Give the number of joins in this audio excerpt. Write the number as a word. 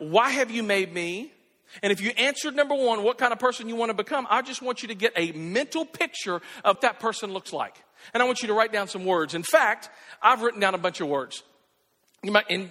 one